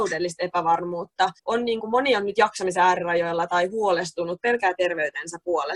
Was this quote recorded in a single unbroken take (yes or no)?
no